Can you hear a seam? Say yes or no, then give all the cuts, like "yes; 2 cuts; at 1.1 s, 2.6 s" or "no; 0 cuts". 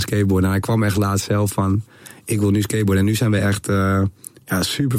no; 0 cuts